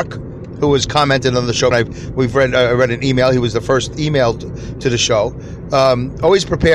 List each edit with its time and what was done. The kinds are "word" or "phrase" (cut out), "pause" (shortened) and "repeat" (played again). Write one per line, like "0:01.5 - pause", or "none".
0:01.7 - word